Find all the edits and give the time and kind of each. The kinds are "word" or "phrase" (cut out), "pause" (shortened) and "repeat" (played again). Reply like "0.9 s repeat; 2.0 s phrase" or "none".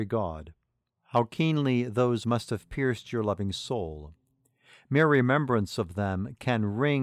2.2 s word